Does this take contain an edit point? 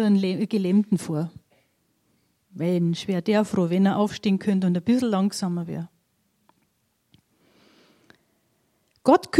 no; 0 cuts

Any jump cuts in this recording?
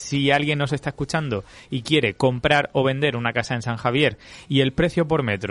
no; 0 cuts

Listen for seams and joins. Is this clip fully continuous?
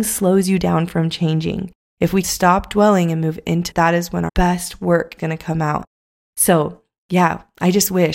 no; 4 cuts; at 2.2 s, 3.7 s, 4.3 s, 5.2 s

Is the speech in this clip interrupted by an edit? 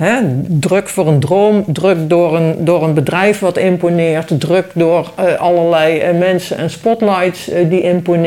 no; 0 cuts

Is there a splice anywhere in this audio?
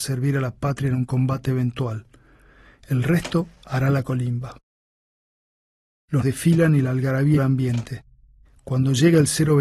yes; 2 cuts; at 6.2 s, 7.4 s

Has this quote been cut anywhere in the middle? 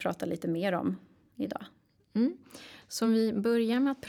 no; 0 cuts

